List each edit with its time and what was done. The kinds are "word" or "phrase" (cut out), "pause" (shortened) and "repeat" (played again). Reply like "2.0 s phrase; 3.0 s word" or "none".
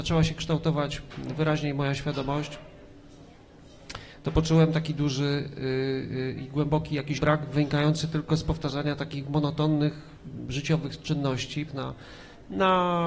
7.2 s word; 11.7 s word